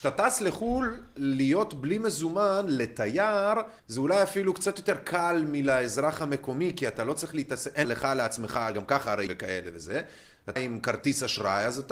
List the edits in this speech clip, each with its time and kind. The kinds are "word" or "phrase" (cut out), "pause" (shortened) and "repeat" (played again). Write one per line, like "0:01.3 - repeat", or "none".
0:03.8 - pause
0:07.8 - word
0:09.3 - word
0:10.6 - word